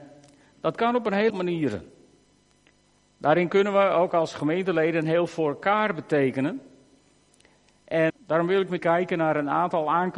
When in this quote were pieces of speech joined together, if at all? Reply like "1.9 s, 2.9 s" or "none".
1.3 s, 5.3 s, 8.1 s, 8.8 s